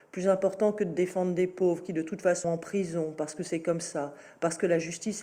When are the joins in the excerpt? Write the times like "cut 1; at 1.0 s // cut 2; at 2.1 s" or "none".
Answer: cut 1; at 2.4 s